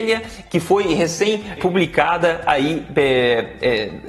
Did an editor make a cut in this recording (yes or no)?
yes